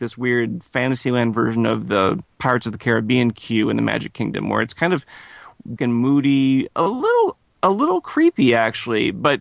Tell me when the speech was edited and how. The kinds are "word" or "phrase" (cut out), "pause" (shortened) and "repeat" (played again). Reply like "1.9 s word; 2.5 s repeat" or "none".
5.8 s word; 6.7 s phrase

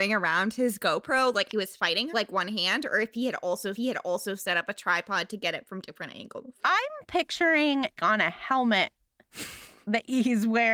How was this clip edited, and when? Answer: 1.5 s word; 2.1 s phrase; 3.7 s repeat; 6.6 s pause; 8.0 s phrase

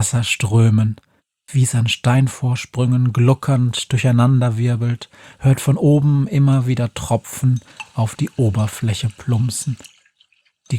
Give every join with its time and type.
none

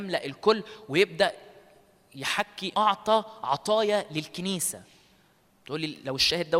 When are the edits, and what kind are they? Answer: 2.7 s word

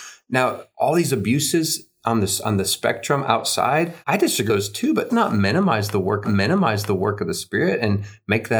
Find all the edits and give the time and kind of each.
4.0 s pause; 4.5 s word; 5.1 s word; 6.2 s repeat

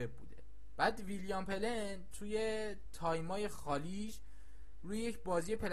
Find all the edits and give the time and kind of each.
none

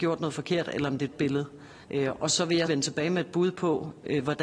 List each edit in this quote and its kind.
1.1 s phrase; 1.8 s pause; 2.7 s word

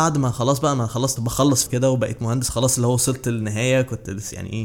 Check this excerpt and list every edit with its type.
1.2 s word; 1.7 s word

